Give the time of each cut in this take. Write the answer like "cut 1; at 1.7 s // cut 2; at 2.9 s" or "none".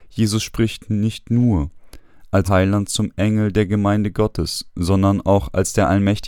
cut 1; at 2.4 s